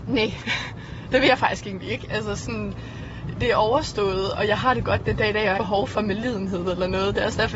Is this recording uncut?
no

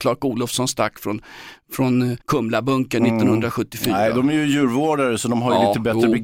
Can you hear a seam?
yes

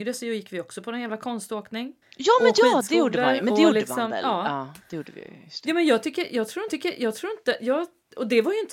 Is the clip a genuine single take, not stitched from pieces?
no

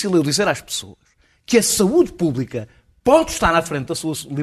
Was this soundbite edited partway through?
no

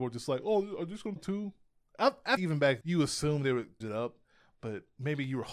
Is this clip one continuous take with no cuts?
no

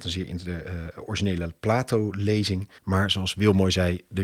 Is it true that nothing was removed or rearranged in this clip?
no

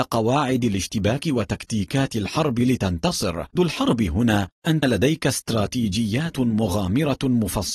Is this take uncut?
no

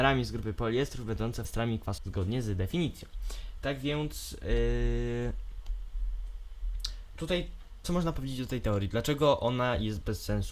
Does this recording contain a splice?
yes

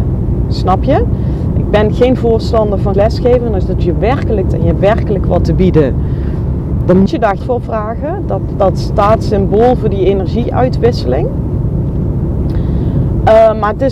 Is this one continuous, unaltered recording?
no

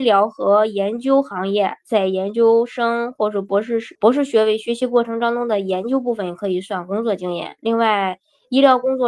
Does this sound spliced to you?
yes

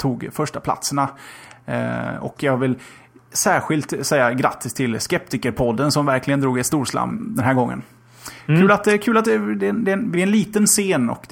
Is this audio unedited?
no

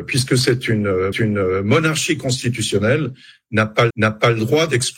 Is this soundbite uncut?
no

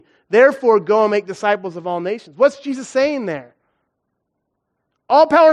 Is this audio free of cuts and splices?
yes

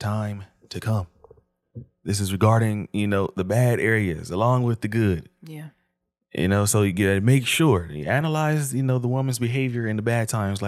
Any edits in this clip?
no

